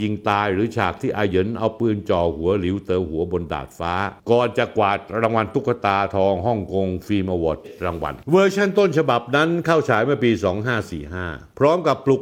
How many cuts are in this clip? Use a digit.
1